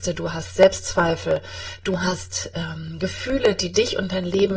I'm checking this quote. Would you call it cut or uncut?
uncut